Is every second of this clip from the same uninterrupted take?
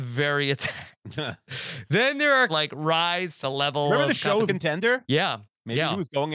no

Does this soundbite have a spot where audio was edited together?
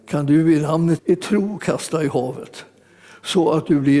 yes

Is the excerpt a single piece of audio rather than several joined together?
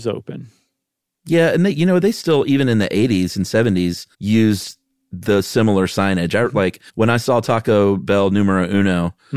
no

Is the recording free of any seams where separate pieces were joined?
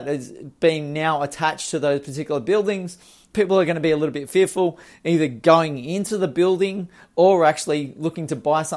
yes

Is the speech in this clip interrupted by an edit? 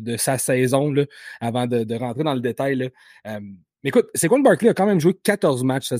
no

